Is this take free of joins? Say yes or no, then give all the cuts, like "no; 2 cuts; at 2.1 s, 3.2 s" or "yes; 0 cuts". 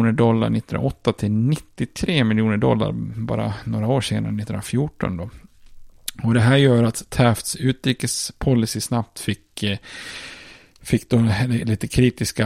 yes; 0 cuts